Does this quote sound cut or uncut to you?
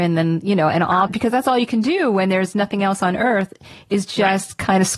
cut